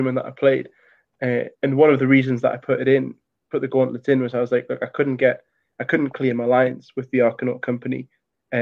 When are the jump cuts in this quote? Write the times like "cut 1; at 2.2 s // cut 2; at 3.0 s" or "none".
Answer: cut 1; at 1.5 s